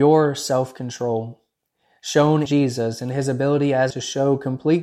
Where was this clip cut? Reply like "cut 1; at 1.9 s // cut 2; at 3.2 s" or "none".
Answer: cut 1; at 2.5 s // cut 2; at 3.9 s